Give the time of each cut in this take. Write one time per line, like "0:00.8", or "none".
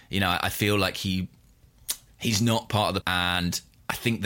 0:02.1
0:03.0